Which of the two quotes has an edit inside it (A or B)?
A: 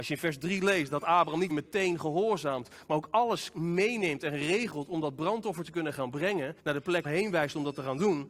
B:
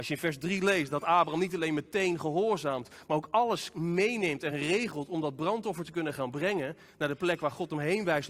A